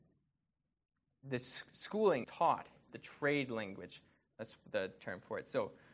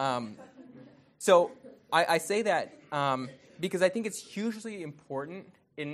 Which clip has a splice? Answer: first; 3 cuts; at 2.2 s, 2.9 s, 5.0 s

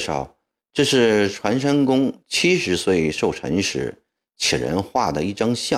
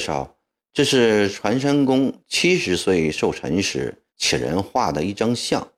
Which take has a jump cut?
second; 1 cut; at 4.1 s

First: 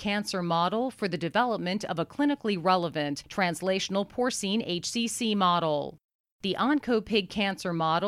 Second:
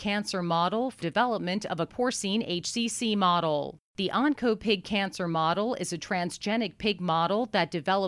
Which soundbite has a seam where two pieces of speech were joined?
second; 3 cuts; at 1.0 s, 1.9 s, 3.9 s

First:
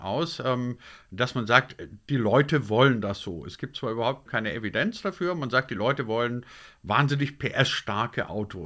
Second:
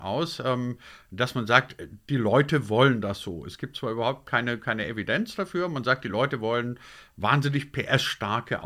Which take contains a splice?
first; 1 cut; at 4.3 s

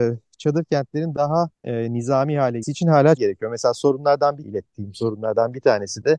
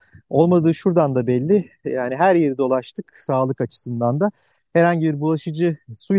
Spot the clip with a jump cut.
first; 4 cuts; at 1.5 s, 2.6 s, 3.2 s, 4.4 s

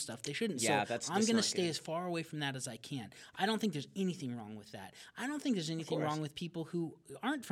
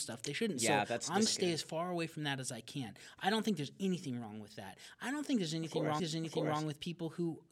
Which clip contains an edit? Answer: second; 2 cuts; at 1.3 s, 6.0 s

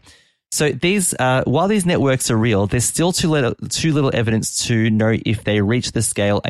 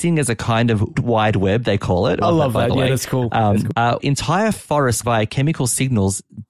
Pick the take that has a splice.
second; 4 cuts; at 0.9 s, 2.2 s, 4.0 s, 5.0 s

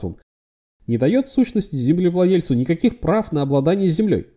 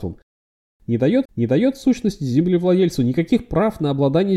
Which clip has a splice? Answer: second; 1 cut; at 1.3 s

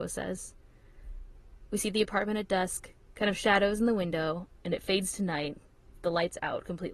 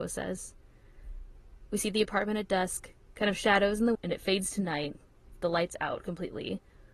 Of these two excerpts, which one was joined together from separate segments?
second; 1 cut; at 3.9 s

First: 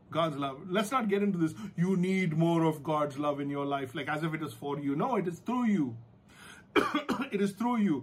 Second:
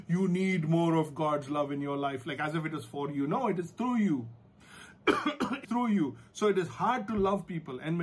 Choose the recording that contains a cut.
second; 1 cut; at 5.6 s

